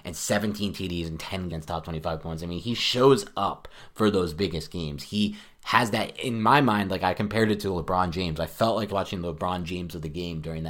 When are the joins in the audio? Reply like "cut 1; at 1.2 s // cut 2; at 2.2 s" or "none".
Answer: cut 1; at 1.5 s // cut 2; at 8.9 s